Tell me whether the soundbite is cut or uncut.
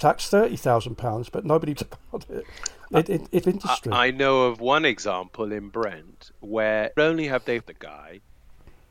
cut